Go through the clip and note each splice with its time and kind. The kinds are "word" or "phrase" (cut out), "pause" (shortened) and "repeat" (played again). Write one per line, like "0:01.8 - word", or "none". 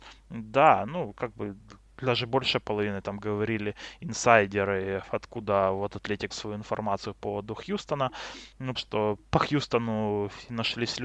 0:06.3 - word
0:08.8 - word